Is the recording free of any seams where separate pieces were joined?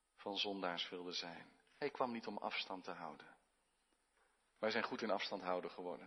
yes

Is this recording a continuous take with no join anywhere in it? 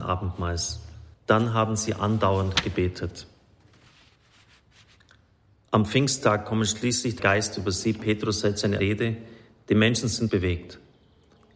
no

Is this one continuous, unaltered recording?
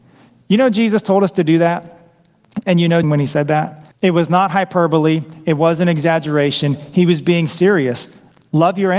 no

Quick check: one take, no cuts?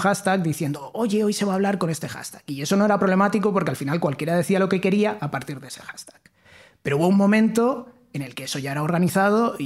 yes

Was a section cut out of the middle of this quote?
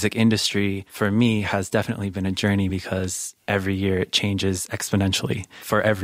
no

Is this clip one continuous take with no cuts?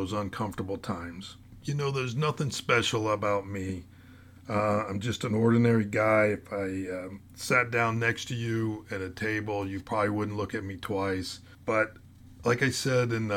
yes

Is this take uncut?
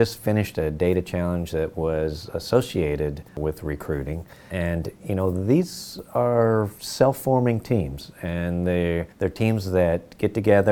no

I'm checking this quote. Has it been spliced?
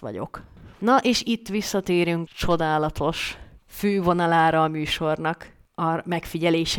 yes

